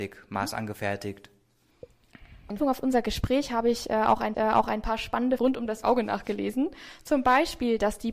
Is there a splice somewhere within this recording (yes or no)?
yes